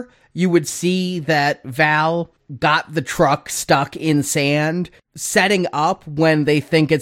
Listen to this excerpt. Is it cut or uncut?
uncut